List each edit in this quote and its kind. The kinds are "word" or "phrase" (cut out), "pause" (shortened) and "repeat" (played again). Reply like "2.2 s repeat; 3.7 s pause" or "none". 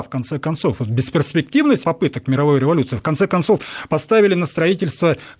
1.8 s word